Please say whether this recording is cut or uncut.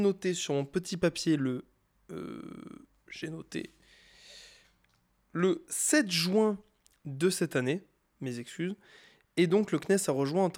uncut